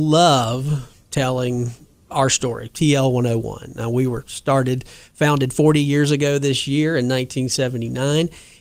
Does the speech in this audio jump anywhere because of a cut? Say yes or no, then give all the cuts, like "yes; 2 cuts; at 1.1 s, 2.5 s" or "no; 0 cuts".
no; 0 cuts